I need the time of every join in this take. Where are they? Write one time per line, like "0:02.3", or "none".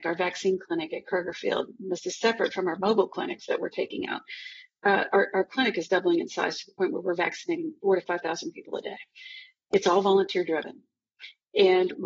none

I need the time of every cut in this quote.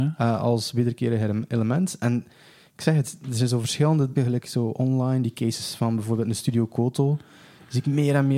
0:04.2

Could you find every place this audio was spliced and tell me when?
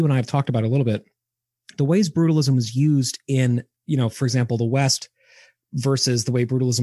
none

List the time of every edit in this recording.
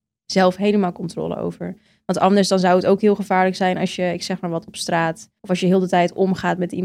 0:05.4

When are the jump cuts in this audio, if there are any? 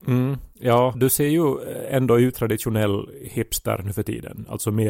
0:00.9
0:02.3

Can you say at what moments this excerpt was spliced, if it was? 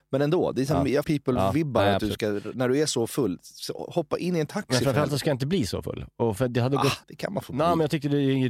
0:01.0
0:07.0

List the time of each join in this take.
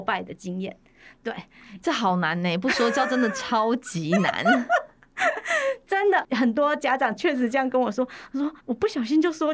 0:08.6

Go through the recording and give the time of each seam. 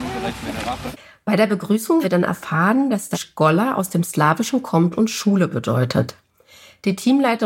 0:02.0
0:03.1

